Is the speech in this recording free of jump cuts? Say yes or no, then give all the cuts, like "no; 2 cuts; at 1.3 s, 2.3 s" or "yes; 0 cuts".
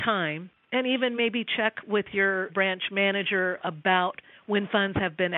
yes; 0 cuts